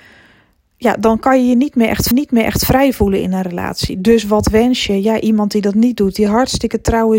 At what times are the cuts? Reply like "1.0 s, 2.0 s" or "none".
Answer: 2.1 s